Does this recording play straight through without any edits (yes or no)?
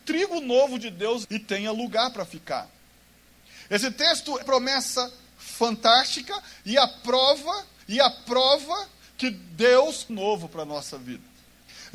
no